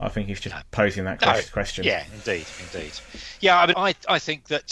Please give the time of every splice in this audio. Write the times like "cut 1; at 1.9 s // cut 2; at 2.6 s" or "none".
cut 1; at 3.7 s